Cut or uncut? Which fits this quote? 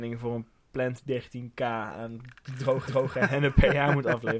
cut